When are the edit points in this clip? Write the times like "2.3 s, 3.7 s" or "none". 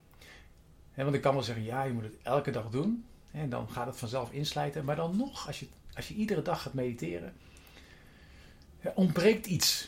none